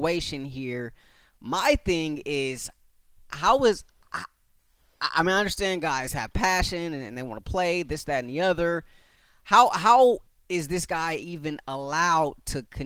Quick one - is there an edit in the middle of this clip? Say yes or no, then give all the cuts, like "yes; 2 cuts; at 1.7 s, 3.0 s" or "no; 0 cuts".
no; 0 cuts